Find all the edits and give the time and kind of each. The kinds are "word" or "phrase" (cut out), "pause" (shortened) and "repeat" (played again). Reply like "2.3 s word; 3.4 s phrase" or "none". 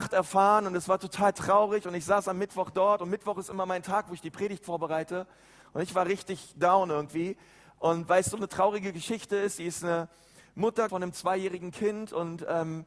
10.9 s word